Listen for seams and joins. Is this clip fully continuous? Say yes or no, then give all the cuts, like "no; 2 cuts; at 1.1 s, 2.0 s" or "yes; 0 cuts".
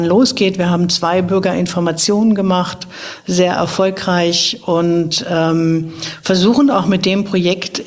yes; 0 cuts